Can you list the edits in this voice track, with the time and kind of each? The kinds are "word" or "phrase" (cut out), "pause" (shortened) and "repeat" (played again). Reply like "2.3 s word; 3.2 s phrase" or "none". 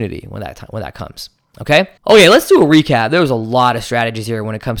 2.0 s pause